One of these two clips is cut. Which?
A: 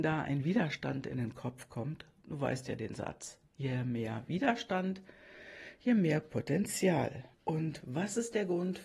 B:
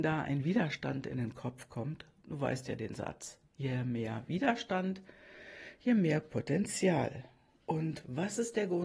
A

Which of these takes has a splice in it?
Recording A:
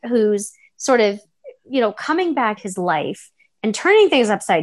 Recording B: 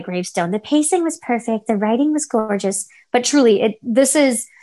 A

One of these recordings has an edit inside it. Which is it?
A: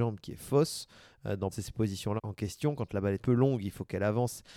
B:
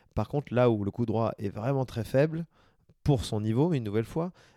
A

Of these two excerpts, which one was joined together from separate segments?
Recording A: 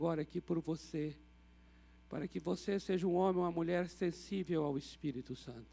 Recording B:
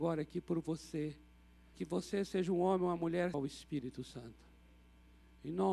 B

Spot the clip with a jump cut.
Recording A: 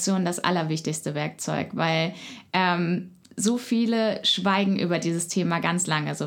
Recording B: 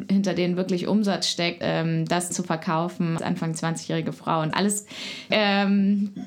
B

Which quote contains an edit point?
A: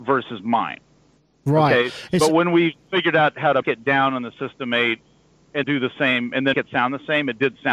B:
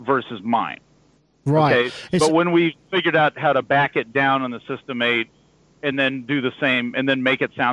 A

